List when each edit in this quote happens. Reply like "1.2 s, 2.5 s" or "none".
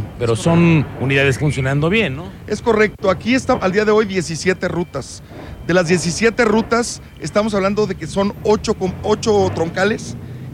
1.4 s, 3.6 s